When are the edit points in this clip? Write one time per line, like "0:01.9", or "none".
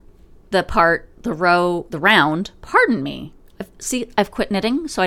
none